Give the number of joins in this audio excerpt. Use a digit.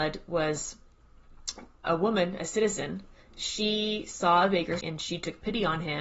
2